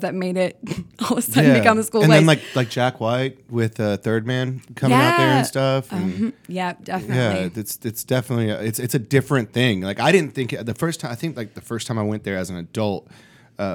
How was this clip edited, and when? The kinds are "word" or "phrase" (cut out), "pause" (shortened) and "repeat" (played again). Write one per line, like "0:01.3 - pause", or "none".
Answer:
0:06.4 - pause